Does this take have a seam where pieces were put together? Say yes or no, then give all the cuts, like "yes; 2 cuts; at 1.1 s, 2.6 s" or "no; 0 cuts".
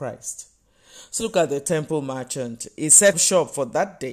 yes; 2 cuts; at 1.2 s, 3.1 s